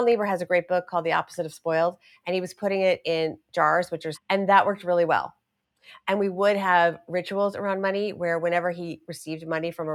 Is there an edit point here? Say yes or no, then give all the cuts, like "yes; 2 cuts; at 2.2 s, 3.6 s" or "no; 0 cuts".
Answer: yes; 1 cut; at 4.1 s